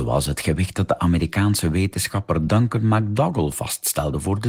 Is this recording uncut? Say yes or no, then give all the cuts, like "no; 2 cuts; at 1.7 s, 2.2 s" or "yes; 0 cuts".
yes; 0 cuts